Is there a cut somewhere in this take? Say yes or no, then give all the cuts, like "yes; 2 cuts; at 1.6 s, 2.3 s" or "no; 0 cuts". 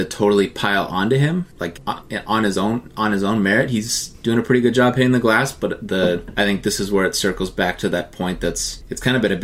no; 0 cuts